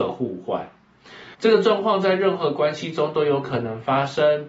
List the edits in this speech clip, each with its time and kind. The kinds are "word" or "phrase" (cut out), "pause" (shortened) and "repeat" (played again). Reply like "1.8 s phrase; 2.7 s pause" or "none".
1.3 s pause